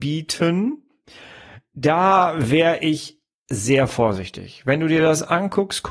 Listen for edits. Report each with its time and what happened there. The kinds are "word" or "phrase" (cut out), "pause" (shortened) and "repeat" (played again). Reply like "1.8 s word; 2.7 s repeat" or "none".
none